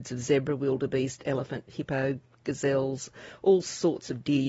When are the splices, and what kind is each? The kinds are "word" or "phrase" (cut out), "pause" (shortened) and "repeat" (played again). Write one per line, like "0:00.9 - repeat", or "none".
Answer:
none